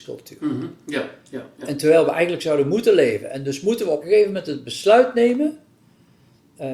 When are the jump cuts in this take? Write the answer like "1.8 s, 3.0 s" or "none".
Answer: 1.6 s, 4.0 s